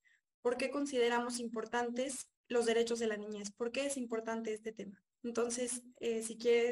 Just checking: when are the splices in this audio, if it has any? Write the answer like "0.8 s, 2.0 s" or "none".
2.4 s, 5.1 s